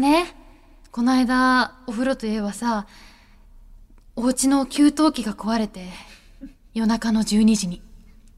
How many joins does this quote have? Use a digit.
0